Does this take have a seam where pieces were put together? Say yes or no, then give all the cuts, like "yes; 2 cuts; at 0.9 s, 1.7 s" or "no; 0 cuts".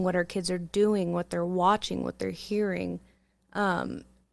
no; 0 cuts